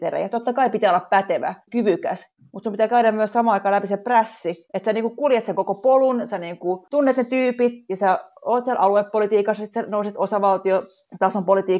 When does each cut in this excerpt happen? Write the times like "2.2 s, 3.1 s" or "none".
1.7 s